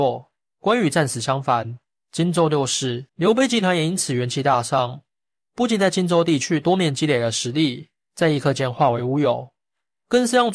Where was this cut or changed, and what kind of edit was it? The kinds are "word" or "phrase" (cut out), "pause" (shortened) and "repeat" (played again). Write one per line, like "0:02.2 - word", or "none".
0:03.1 - pause